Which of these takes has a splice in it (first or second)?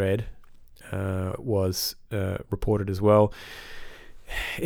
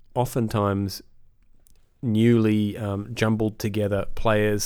first